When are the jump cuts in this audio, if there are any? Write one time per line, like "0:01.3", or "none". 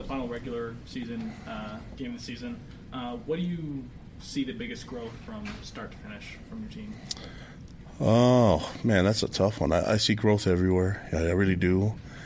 none